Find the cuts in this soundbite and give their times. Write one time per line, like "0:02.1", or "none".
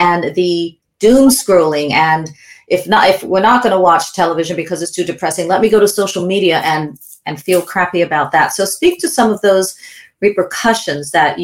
none